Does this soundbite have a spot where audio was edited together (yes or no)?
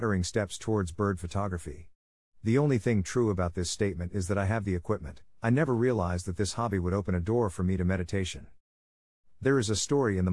no